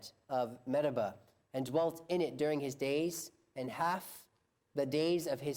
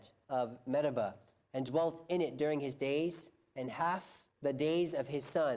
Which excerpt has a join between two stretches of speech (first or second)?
second